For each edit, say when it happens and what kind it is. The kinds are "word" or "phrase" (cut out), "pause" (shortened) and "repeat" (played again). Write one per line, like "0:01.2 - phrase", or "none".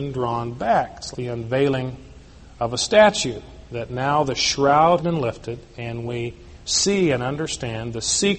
0:01.1 - word
0:05.0 - word